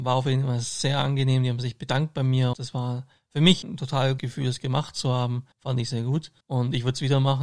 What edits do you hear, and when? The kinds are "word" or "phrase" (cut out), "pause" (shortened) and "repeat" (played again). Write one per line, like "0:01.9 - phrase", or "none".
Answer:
0:02.5 - word
0:03.6 - word
0:04.2 - word
0:05.5 - pause
0:05.9 - word
0:06.4 - pause